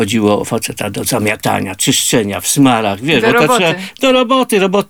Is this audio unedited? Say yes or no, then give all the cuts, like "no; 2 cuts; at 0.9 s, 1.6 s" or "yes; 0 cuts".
yes; 0 cuts